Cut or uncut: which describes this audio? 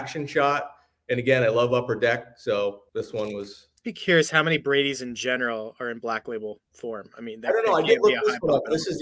cut